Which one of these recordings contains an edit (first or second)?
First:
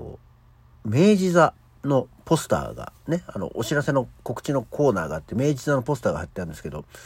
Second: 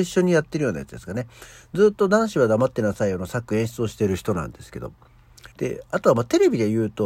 second